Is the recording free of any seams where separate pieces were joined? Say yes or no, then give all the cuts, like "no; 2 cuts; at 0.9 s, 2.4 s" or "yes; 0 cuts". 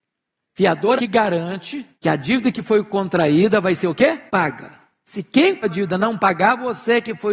no; 4 cuts; at 1.0 s, 1.9 s, 4.3 s, 5.6 s